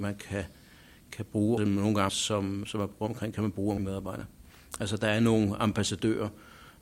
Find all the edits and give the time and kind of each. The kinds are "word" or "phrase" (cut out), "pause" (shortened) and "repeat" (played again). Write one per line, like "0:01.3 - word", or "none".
0:01.6 - word
0:02.1 - word
0:02.6 - word
0:03.3 - word
0:03.8 - word